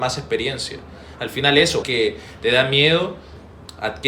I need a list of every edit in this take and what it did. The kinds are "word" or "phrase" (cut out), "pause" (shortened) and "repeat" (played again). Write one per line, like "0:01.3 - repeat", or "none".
0:01.8 - phrase

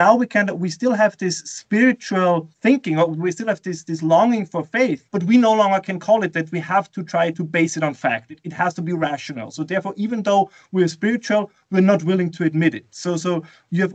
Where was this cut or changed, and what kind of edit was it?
0:02.5 - pause
0:05.1 - pause
0:07.3 - word

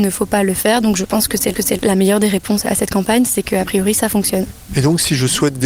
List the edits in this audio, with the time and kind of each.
0:01.6 - repeat

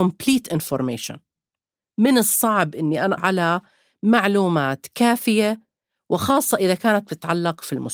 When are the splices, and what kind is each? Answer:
0:03.2 - word

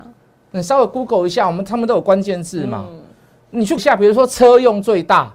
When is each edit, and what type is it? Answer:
0:03.8 - word

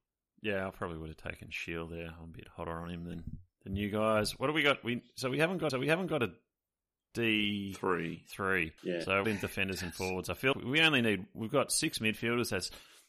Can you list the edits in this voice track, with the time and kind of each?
0:05.7 - repeat
0:08.8 - pause
0:09.2 - phrase
0:10.5 - word

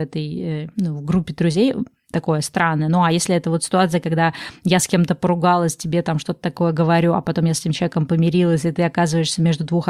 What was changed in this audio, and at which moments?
none

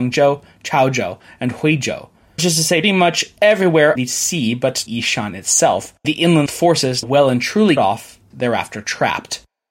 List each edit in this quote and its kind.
0:02.4 - word
0:02.8 - word
0:04.0 - word
0:04.9 - word
0:06.0 - word
0:06.5 - word
0:07.0 - word
0:07.8 - word
0:08.3 - word

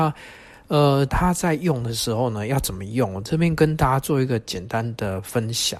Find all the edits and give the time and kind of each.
0:01.1 - phrase

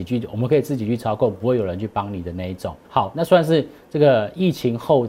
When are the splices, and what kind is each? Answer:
0:02.8 - pause

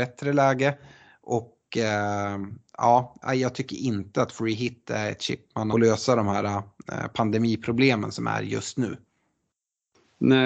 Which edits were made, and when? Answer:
0:05.7 - phrase

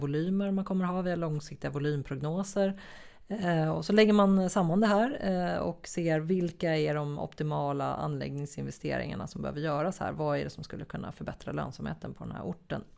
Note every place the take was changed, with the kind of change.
none

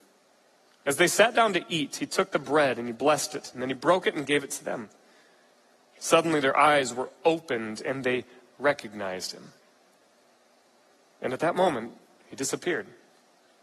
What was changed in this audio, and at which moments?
none

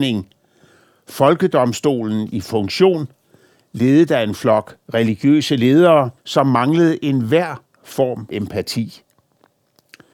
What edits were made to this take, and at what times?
0:06.2 - pause
0:08.3 - word

